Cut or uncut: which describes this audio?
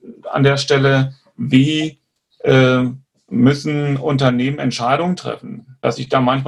uncut